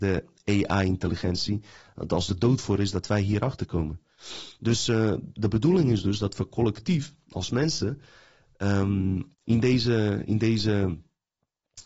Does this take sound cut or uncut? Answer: cut